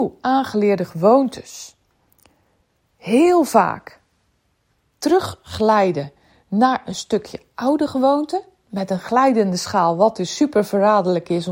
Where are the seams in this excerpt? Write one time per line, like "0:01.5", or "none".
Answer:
none